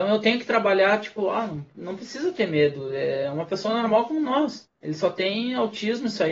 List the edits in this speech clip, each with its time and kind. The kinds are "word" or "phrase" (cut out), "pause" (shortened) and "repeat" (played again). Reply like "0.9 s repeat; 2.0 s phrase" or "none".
4.8 s pause